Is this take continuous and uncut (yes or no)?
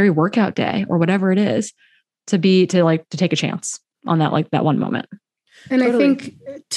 yes